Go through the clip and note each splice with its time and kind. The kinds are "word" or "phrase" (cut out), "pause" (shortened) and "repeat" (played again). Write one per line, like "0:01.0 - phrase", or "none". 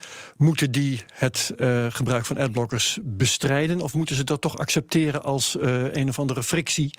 none